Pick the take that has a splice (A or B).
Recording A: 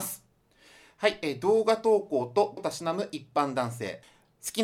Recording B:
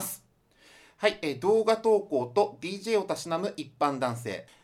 A